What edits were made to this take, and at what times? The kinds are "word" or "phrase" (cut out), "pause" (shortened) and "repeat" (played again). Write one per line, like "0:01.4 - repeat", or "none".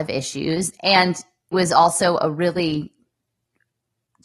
0:01.5 - word